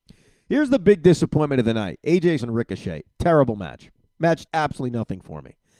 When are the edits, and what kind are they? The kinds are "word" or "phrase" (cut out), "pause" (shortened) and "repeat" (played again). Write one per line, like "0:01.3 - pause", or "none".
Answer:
0:02.4 - word
0:04.5 - word